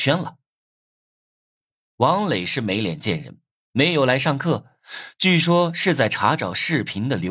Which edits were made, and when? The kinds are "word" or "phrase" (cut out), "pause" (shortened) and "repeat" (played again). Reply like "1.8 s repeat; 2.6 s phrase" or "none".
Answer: none